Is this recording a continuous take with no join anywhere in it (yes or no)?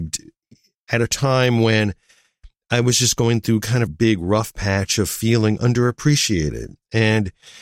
no